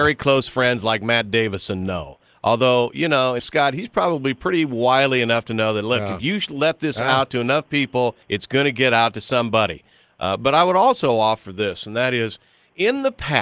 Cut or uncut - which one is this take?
cut